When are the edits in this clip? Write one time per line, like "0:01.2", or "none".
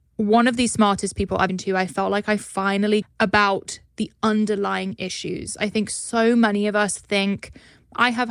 0:01.5
0:03.0